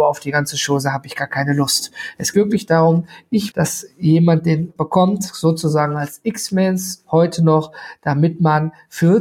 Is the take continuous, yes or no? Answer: no